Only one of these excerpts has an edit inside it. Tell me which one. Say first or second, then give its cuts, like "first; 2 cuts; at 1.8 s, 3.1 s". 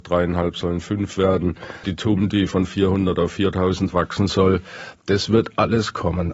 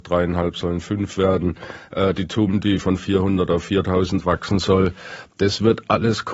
first; 1 cut; at 1.8 s